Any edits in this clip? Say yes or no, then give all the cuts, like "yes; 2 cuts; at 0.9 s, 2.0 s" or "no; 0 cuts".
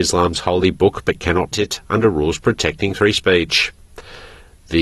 yes; 1 cut; at 1.5 s